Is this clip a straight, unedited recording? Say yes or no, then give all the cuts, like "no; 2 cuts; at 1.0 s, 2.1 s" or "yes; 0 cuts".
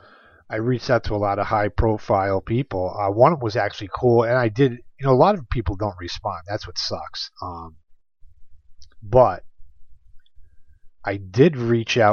yes; 0 cuts